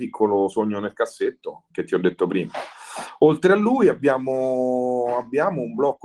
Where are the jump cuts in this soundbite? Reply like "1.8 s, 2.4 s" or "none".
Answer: 1.7 s